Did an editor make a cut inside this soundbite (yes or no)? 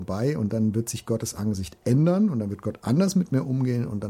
no